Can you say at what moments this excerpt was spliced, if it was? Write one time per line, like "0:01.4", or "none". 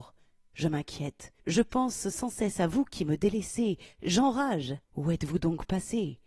0:01.4
0:04.8